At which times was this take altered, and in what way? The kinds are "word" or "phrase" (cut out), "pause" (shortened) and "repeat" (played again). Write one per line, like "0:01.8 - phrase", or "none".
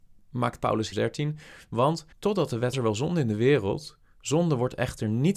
0:00.9 - phrase
0:02.1 - pause
0:02.7 - phrase